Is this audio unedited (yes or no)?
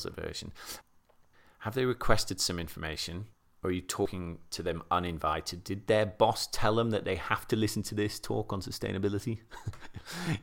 yes